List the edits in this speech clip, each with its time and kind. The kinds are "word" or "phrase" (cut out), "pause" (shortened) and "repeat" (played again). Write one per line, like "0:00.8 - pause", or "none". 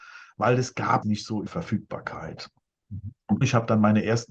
0:01.0 - word
0:01.5 - word
0:03.4 - word